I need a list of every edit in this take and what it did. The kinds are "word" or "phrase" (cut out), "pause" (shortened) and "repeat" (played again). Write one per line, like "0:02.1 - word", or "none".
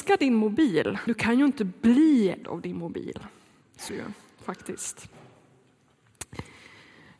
0:01.1 - word
0:02.4 - word
0:03.9 - word